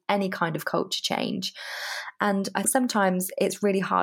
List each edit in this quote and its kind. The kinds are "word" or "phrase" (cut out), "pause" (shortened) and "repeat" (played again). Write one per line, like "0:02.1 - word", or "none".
0:02.6 - word